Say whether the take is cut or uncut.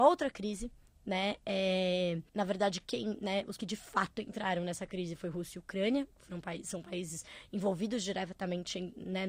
cut